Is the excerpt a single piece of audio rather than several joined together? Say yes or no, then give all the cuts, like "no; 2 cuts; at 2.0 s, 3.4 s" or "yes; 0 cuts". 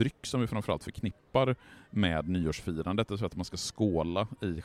yes; 0 cuts